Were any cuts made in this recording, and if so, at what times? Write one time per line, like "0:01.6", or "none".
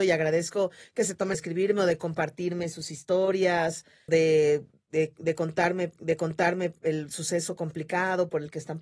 0:01.3
0:04.1
0:06.0

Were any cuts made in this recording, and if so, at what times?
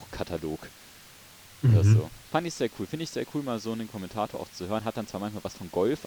none

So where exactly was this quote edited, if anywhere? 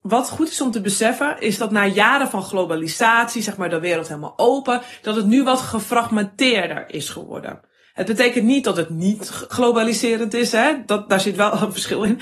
none

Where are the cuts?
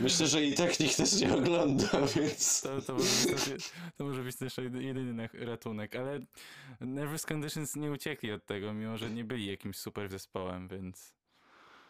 0:10.1

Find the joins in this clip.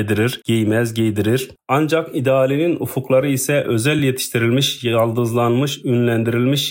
none

